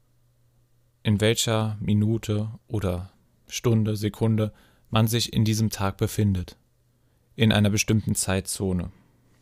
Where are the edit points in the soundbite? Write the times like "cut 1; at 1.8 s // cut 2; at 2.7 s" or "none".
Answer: none